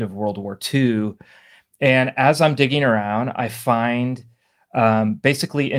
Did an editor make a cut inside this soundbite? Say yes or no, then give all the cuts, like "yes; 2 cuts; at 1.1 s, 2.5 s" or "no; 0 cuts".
no; 0 cuts